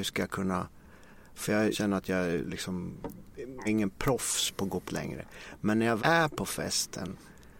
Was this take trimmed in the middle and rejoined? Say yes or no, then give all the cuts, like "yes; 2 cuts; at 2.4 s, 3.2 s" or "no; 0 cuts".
yes; 4 cuts; at 1.7 s, 3.6 s, 4.9 s, 6.0 s